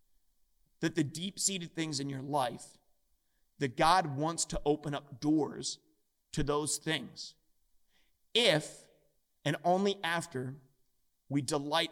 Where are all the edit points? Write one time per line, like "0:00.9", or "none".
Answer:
none